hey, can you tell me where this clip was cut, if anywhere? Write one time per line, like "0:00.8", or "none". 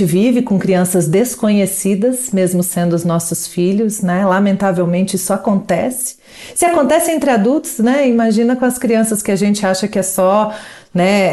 none